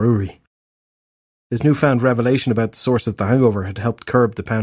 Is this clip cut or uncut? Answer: uncut